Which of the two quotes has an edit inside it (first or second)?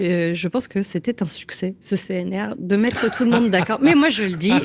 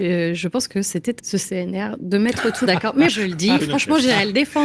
second